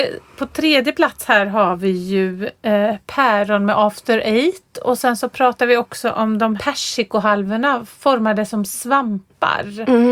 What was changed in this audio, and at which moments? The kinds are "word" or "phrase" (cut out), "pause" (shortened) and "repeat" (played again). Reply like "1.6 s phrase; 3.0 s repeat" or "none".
6.6 s word